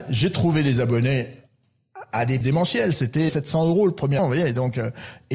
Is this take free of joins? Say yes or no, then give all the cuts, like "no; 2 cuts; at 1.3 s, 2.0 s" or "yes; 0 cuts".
no; 3 cuts; at 2.4 s, 3.3 s, 4.2 s